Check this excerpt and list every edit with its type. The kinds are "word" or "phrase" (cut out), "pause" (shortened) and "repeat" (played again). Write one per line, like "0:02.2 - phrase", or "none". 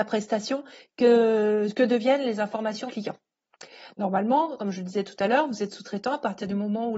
0:02.9 - word